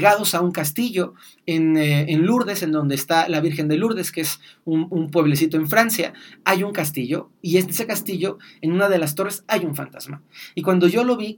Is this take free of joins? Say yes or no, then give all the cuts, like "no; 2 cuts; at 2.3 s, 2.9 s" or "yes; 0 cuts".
yes; 0 cuts